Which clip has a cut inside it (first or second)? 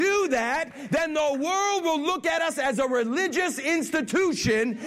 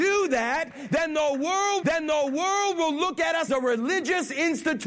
second